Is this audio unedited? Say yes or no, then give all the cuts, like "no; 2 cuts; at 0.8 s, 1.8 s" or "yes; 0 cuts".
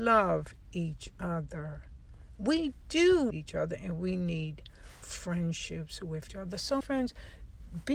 no; 4 cuts; at 3.3 s, 5.0 s, 6.3 s, 6.8 s